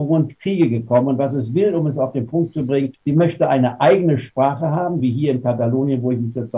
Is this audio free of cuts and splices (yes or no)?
no